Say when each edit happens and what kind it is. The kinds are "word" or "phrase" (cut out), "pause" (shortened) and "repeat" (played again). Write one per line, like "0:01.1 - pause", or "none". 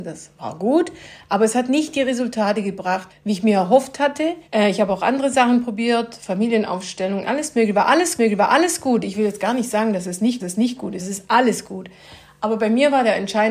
0:03.1 - phrase
0:04.4 - pause
0:08.2 - repeat
0:10.4 - repeat
0:11.0 - word